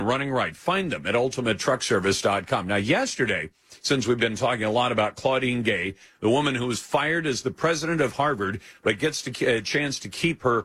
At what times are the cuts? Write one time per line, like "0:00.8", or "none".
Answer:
none